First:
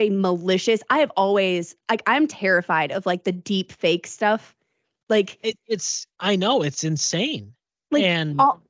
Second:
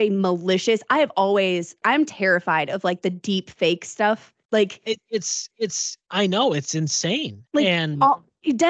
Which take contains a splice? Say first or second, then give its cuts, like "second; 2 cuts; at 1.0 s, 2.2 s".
second; 4 cuts; at 1.8 s, 4.4 s, 5.5 s, 7.5 s